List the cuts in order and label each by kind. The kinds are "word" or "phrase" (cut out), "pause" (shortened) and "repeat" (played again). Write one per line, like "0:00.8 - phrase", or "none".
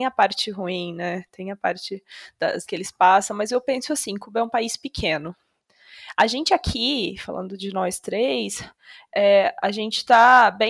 0:02.7 - word